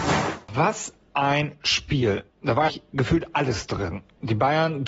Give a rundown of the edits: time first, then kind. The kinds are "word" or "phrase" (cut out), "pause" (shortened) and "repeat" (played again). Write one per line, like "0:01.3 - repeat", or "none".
0:02.3 - pause
0:02.7 - phrase